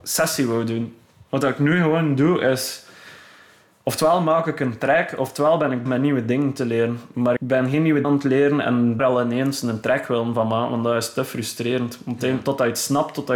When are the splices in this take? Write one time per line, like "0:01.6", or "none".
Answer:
0:05.9
0:07.4
0:08.0
0:09.0